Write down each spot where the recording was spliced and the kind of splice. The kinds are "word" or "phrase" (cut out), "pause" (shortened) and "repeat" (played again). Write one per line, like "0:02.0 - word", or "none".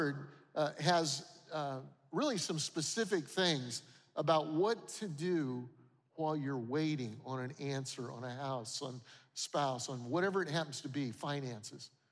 none